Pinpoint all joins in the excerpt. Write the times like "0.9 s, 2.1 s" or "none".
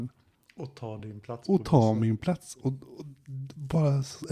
none